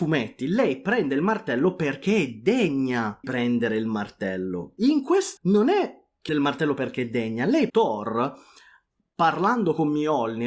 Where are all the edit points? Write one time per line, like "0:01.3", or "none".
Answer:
0:03.2
0:05.4
0:06.3
0:07.7